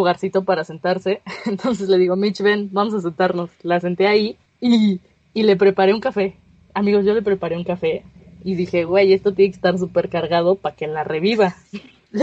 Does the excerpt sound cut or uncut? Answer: uncut